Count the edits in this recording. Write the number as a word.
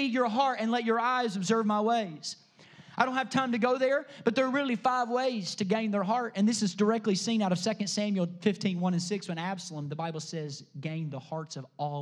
zero